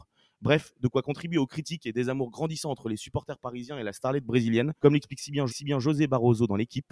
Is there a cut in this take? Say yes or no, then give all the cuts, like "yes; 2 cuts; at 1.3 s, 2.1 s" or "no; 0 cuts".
yes; 2 cuts; at 4.8 s, 5.5 s